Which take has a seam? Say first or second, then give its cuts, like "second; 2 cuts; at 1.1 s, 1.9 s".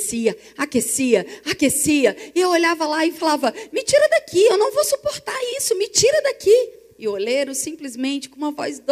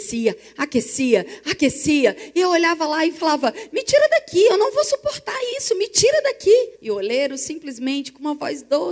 second; 1 cut; at 6.8 s